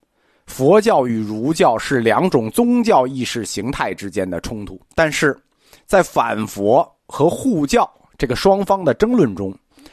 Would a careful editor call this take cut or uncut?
cut